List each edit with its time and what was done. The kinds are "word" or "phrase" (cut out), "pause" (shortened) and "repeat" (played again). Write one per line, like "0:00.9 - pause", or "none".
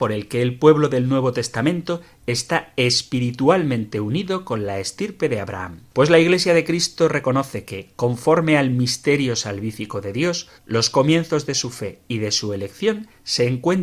0:05.9 - pause
0:10.6 - pause